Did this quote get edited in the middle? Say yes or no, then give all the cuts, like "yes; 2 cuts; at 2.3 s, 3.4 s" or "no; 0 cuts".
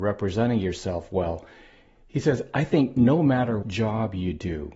yes; 1 cut; at 3.6 s